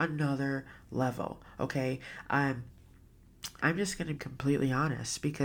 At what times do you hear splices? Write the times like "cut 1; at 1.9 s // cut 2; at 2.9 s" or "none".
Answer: cut 1; at 3.6 s // cut 2; at 4.2 s